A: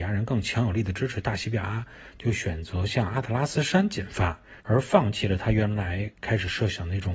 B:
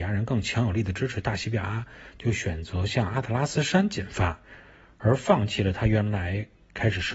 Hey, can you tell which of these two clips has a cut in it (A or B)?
A